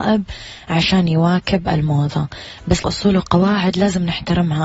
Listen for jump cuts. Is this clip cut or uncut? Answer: cut